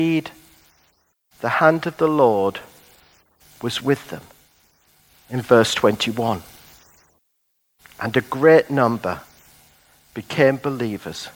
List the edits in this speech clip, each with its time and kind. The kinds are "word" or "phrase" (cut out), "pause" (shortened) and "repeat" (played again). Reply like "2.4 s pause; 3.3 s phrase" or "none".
none